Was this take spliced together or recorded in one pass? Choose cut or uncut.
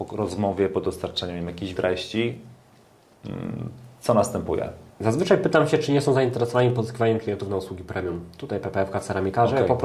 cut